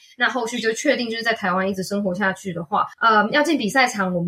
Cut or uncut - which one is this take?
cut